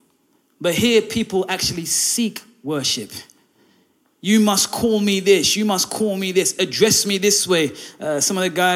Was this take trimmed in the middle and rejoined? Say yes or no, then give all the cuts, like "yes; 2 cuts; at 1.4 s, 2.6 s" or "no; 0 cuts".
no; 0 cuts